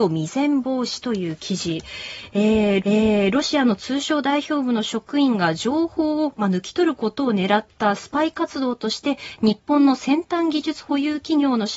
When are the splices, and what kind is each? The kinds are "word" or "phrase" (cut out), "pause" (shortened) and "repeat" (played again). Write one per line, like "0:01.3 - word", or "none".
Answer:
0:02.8 - repeat